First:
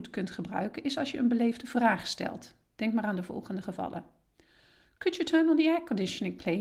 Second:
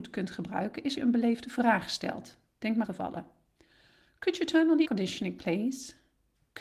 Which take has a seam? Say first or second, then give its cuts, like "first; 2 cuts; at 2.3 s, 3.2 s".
second; 3 cuts; at 1.0 s, 2.8 s, 4.8 s